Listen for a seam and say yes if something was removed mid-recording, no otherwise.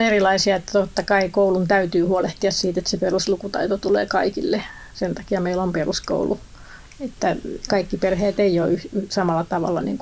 no